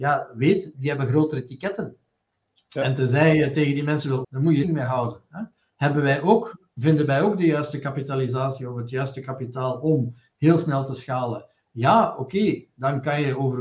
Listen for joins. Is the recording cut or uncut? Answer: cut